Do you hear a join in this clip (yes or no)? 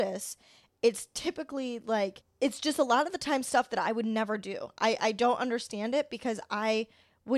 yes